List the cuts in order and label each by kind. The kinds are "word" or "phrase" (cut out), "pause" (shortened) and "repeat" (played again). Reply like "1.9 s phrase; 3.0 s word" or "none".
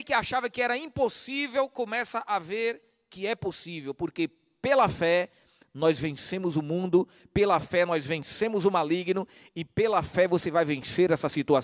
none